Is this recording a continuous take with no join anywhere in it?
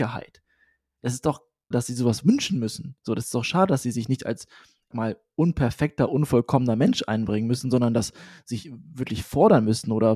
no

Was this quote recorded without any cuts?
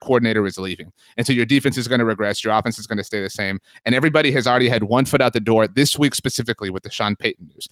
yes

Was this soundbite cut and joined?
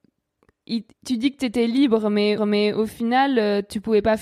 yes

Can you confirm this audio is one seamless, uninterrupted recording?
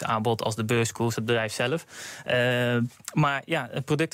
no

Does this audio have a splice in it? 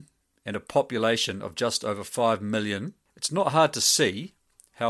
no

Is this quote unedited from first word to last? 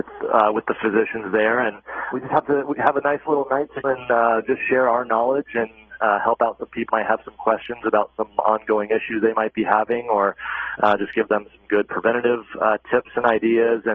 no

